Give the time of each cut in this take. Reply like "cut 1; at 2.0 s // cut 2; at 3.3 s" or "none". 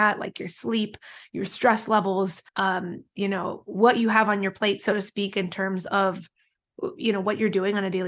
cut 1; at 2.5 s